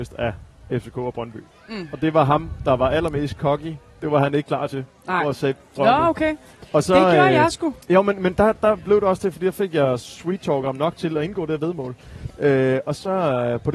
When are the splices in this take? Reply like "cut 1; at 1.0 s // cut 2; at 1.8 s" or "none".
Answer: cut 1; at 5.8 s // cut 2; at 7.8 s